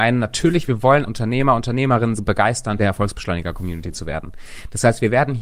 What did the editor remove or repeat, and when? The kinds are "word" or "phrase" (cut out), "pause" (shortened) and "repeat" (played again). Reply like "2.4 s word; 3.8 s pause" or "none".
1.1 s word; 2.2 s word; 2.8 s word